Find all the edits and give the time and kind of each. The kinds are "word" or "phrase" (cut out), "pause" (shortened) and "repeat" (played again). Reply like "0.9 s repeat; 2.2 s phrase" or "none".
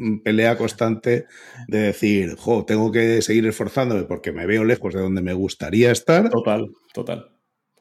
none